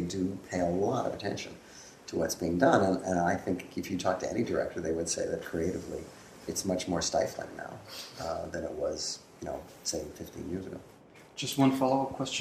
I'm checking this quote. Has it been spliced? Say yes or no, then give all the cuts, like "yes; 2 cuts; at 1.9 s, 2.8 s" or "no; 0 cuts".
no; 0 cuts